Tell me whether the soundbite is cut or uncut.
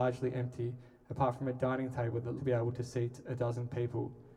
cut